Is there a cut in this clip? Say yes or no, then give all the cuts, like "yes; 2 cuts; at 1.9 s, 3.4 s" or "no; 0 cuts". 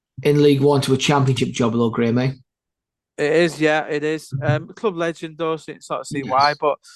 no; 0 cuts